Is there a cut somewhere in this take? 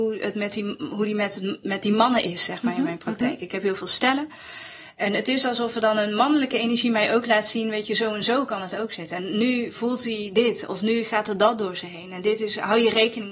no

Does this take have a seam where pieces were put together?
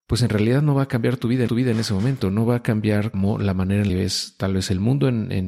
yes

